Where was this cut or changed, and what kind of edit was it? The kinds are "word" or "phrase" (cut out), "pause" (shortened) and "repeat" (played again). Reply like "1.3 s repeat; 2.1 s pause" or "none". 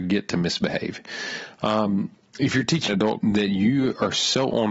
2.9 s word; 3.2 s phrase